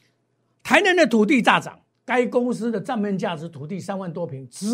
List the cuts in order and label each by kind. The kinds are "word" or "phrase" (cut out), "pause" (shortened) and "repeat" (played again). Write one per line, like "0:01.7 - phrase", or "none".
0:01.9 - pause